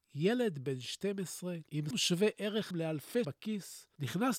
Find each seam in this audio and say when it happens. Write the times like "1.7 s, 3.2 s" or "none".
1.9 s, 2.7 s, 3.2 s